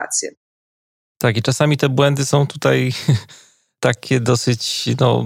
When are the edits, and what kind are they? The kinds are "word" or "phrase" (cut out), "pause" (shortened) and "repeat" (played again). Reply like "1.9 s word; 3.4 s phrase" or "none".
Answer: none